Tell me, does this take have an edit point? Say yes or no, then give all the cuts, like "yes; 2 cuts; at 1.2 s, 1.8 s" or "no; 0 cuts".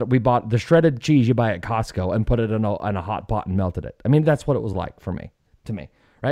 no; 0 cuts